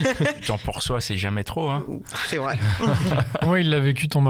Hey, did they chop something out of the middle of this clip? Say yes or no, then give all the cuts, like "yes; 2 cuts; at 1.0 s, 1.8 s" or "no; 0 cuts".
no; 0 cuts